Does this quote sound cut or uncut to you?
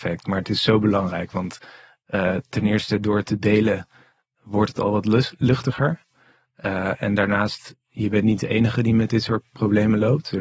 uncut